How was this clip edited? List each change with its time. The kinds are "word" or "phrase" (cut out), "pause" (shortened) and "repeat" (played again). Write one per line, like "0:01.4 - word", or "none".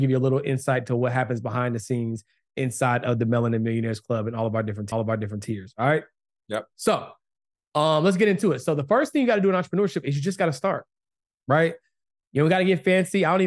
0:04.9 - repeat